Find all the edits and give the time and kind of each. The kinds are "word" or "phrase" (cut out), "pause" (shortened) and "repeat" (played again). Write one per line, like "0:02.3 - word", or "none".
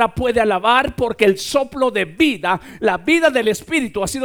none